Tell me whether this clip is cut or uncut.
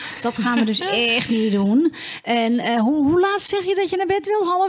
uncut